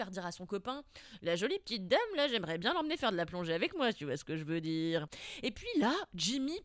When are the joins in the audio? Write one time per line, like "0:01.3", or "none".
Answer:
none